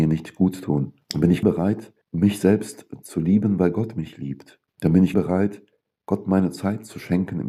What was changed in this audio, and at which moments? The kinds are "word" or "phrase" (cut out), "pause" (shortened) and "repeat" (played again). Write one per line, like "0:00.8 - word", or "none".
0:01.0 - pause
0:01.4 - word
0:02.0 - pause
0:04.7 - pause
0:05.1 - word